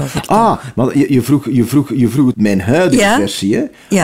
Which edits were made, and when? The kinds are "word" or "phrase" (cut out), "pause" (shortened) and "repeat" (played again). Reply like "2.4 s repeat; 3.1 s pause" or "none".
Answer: 1.7 s repeat; 2.3 s word

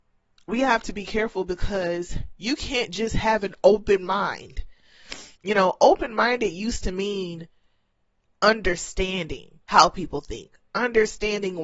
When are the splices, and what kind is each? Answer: 5.4 s pause; 9.6 s pause

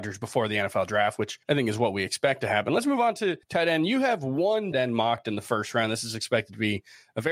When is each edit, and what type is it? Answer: 1.4 s pause; 3.4 s pause; 4.7 s word

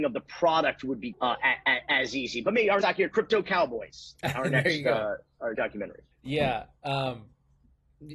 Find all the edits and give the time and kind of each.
1.1 s word; 2.8 s word; 5.5 s word; 6.1 s pause

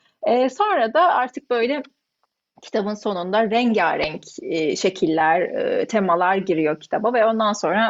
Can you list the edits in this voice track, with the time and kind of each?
none

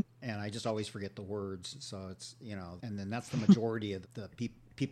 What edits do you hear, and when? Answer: 2.8 s word; 4.0 s word

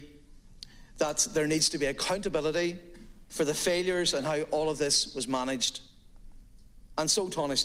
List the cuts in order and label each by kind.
none

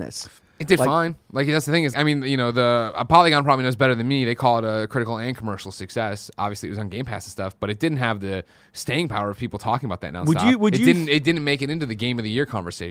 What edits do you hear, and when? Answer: 1.9 s word

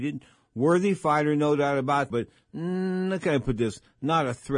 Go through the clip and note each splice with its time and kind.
2.1 s word

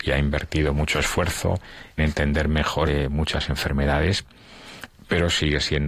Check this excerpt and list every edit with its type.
2.0 s word; 2.9 s phrase

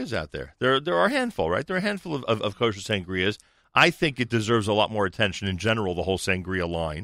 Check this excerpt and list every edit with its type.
none

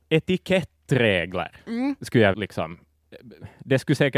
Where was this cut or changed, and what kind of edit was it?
2.3 s word

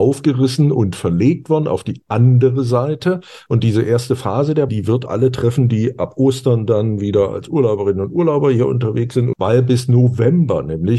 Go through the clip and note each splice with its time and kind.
4.7 s word; 5.1 s word

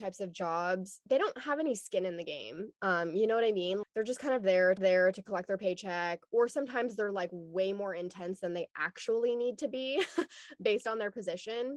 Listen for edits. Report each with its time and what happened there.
3.8 s word; 4.8 s repeat

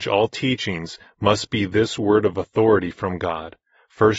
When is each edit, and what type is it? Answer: none

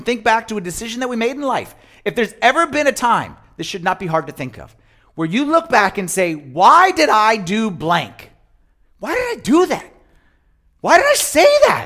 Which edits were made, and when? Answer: none

